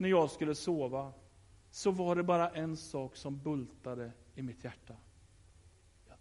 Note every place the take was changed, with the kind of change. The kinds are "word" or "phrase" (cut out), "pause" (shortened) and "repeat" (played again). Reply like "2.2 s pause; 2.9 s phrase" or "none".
none